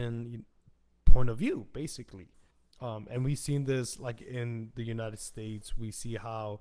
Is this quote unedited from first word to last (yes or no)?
no